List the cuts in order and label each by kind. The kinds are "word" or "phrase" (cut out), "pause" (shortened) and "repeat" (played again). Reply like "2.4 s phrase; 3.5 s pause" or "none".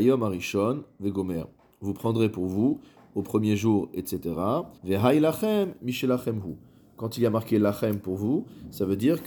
4.8 s pause